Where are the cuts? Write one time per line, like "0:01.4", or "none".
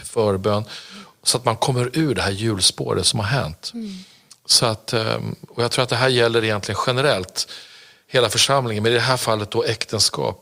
none